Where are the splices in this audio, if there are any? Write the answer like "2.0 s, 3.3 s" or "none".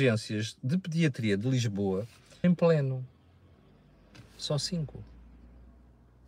2.4 s